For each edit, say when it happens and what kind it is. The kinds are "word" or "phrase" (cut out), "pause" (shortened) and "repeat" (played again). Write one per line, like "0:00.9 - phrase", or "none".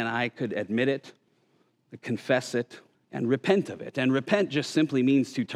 0:02.9 - pause